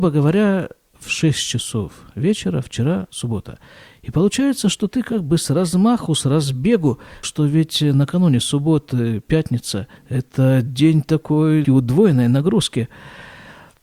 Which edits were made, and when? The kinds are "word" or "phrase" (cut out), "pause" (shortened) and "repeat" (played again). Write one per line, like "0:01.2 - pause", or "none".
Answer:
0:03.1 - word
0:07.2 - word
0:10.0 - pause
0:11.6 - word